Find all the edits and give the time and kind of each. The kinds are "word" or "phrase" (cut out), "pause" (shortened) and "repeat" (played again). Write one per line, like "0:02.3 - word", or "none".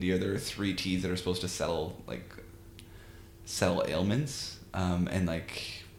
none